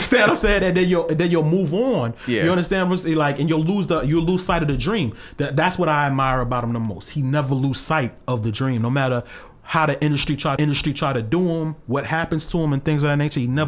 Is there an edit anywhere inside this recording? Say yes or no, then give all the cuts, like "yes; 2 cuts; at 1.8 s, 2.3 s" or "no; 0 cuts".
yes; 1 cut; at 10.6 s